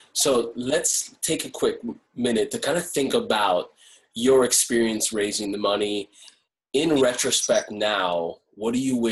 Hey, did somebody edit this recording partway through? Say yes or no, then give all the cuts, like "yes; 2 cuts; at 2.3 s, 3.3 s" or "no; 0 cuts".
no; 0 cuts